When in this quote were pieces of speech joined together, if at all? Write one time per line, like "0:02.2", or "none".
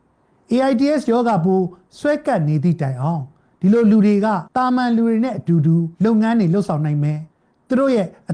0:04.5
0:05.9
0:07.3